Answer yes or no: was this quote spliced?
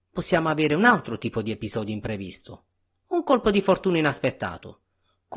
no